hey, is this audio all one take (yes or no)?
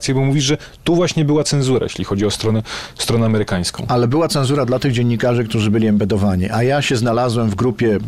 yes